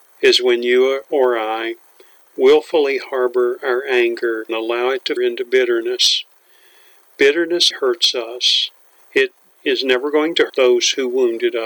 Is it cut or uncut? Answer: cut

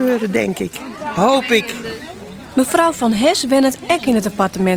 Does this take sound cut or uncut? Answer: uncut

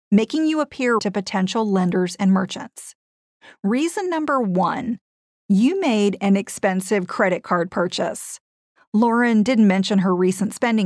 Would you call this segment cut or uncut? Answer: cut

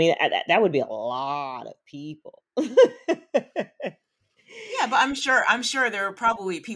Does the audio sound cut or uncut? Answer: uncut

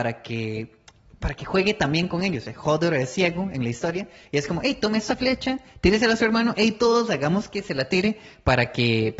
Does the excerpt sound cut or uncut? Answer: uncut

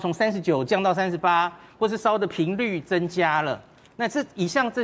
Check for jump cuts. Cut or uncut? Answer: uncut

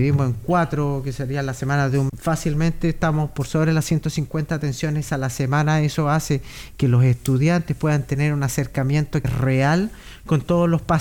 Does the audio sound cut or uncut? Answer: cut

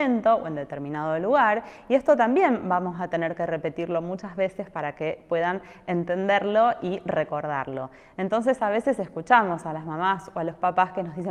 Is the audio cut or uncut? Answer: uncut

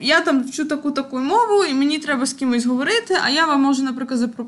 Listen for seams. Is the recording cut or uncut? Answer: uncut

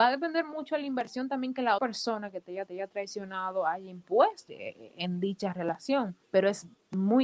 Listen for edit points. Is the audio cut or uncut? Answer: cut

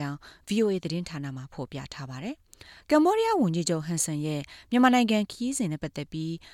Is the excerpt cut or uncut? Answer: cut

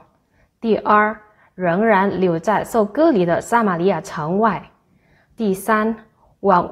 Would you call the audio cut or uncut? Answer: uncut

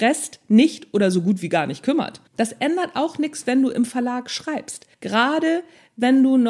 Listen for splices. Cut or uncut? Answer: cut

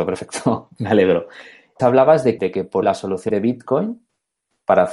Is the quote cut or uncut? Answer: cut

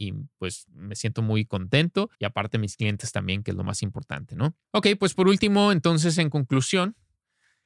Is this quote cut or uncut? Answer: cut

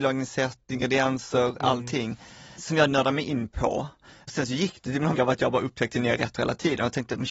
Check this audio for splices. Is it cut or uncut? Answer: cut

